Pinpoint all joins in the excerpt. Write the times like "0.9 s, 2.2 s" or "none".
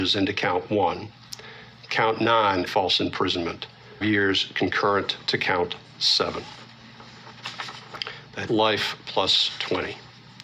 2.7 s, 4.0 s, 8.5 s